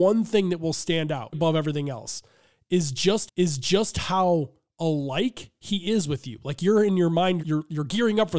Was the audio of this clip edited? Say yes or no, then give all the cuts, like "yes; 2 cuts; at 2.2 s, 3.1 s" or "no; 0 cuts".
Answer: yes; 3 cuts; at 1.3 s, 3.3 s, 7.4 s